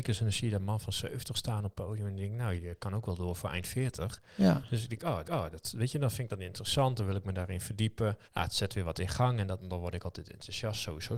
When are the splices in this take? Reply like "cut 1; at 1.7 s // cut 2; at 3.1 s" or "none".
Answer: cut 1; at 2.6 s // cut 2; at 5.2 s // cut 3; at 8.2 s // cut 4; at 9.6 s